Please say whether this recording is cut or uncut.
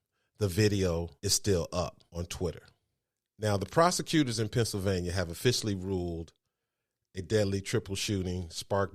cut